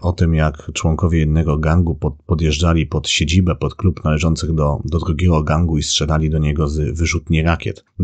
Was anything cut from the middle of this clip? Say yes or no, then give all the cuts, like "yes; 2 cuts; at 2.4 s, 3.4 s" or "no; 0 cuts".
no; 0 cuts